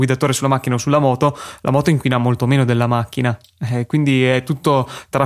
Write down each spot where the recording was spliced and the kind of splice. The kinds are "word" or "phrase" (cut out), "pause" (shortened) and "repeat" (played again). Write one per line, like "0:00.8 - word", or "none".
none